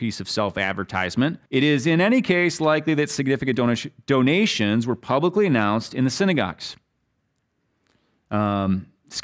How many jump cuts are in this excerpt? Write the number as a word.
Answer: one